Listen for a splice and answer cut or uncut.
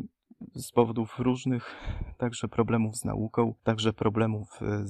cut